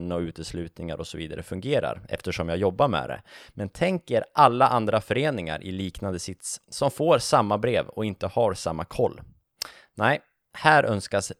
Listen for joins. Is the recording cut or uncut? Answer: uncut